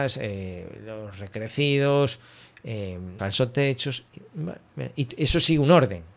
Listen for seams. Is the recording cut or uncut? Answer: cut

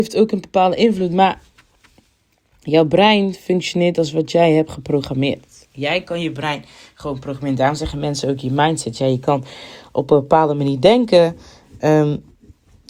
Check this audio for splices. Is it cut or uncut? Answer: uncut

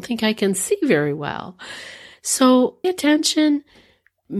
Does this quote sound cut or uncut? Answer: cut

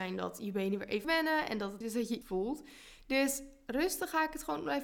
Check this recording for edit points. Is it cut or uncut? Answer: cut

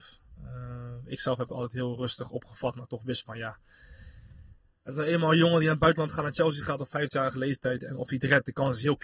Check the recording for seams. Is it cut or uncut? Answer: uncut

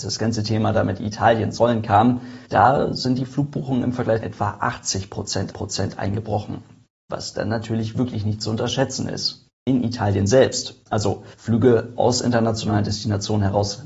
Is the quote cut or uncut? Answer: cut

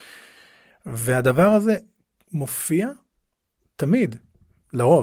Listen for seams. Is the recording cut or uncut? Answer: uncut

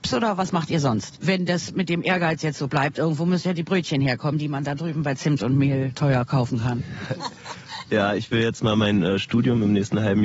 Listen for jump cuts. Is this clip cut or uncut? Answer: uncut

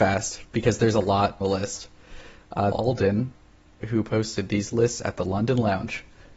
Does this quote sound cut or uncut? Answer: cut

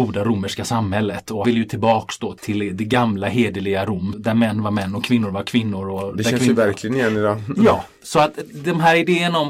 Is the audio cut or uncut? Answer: cut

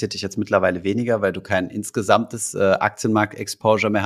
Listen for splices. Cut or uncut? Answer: uncut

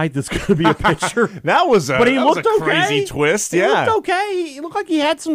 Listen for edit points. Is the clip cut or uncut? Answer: uncut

